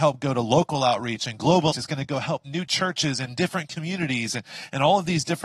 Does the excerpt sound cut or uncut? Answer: cut